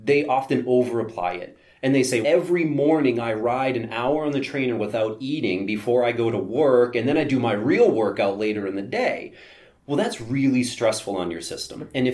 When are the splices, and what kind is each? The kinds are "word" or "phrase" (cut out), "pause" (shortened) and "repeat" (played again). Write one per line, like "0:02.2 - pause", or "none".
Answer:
0:02.2 - word